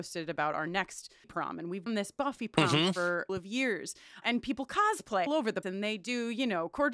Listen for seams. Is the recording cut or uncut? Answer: cut